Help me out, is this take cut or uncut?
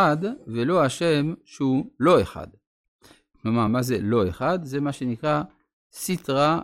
uncut